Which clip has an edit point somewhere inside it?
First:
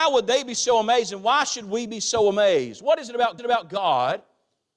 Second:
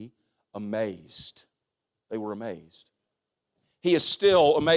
first; 1 cut; at 3.4 s

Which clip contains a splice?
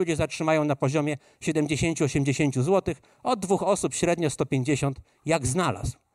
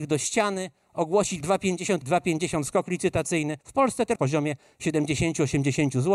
second; 4 cuts; at 1.4 s, 2.0 s, 3.6 s, 4.2 s

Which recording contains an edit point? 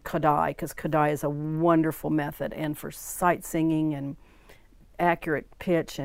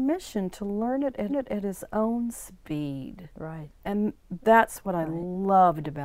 second; 2 cuts; at 1.3 s, 3.7 s

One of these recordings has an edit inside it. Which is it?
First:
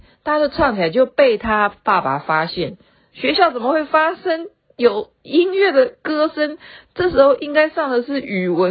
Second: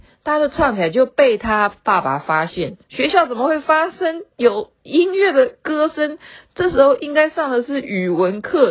second; 2 cuts; at 2.8 s, 4.3 s

